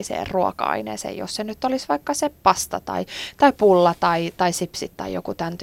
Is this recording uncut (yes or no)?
yes